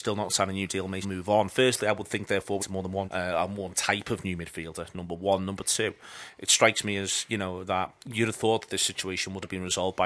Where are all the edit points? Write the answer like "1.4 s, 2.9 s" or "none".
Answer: 1.0 s, 2.6 s, 3.1 s, 8.0 s